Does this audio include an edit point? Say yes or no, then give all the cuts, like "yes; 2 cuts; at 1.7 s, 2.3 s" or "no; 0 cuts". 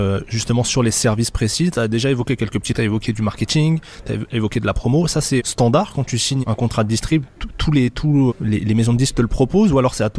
yes; 4 cuts; at 2.7 s, 5.4 s, 6.4 s, 8.3 s